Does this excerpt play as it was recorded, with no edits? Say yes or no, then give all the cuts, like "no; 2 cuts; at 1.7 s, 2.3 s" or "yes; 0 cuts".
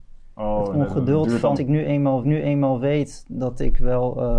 no; 2 cuts; at 1.6 s, 2.2 s